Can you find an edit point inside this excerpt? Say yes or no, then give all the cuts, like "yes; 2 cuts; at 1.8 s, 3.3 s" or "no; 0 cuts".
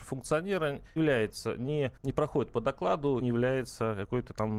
yes; 3 cuts; at 1.0 s, 2.0 s, 3.2 s